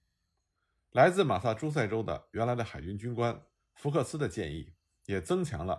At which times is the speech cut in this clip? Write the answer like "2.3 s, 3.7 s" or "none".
none

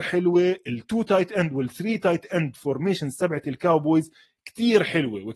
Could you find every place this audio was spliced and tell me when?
none

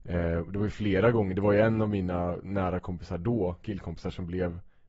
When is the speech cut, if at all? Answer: none

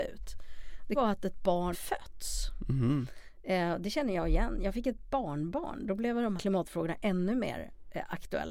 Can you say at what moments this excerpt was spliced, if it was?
0.9 s, 1.7 s, 6.4 s

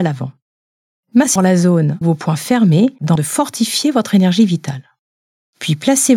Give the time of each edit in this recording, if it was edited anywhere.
1.4 s, 2.0 s, 3.2 s

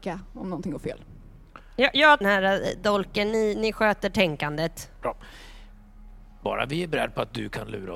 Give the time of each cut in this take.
2.2 s

